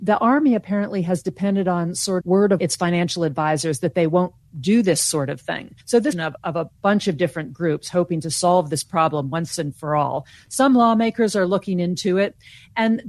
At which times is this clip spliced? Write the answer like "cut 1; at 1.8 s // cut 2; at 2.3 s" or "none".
cut 1; at 2.2 s // cut 2; at 2.6 s // cut 3; at 5.8 s // cut 4; at 6.1 s